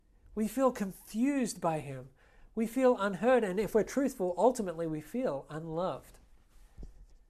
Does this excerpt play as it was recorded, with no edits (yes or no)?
yes